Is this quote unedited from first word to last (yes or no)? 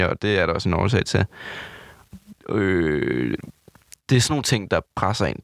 yes